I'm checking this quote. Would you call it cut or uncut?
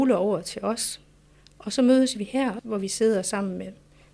uncut